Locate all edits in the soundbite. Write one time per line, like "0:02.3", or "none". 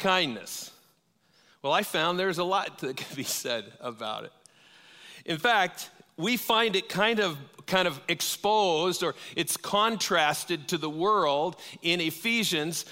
none